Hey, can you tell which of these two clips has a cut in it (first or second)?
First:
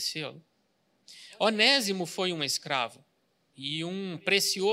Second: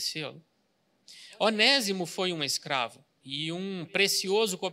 second